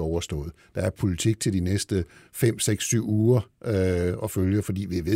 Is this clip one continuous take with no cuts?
yes; 0 cuts

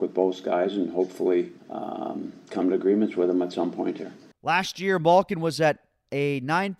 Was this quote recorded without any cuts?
no; 2 cuts; at 1.6 s, 4.3 s

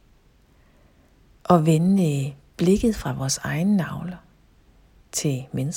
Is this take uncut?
yes; 0 cuts

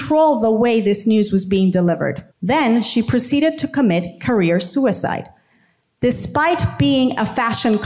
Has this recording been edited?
yes; 1 cut; at 2.3 s

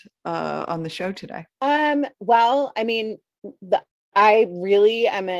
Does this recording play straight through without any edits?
no; 1 cut; at 1.5 s

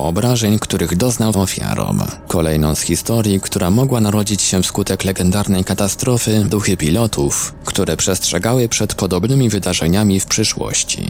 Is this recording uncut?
no; 2 cuts; at 1.3 s, 6.5 s

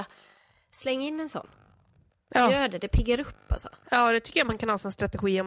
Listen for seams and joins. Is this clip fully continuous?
yes; 0 cuts

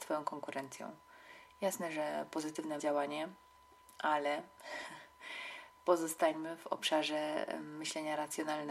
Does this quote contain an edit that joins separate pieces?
yes; 1 cut; at 2.8 s

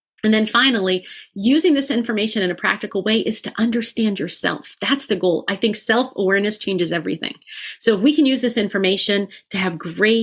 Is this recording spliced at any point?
no; 0 cuts

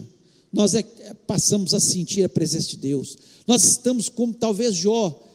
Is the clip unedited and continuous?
yes; 0 cuts

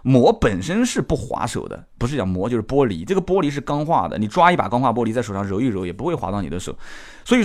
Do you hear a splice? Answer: yes; 1 cut; at 1.9 s

